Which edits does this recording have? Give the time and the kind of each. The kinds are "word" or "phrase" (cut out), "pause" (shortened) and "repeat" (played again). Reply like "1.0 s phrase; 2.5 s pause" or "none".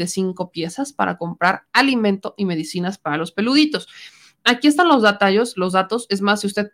none